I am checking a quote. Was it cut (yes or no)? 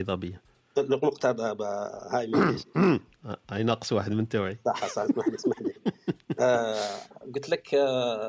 no